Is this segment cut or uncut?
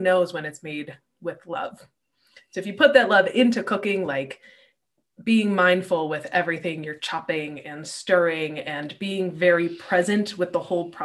uncut